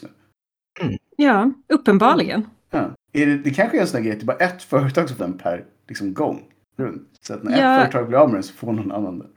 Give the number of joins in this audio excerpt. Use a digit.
4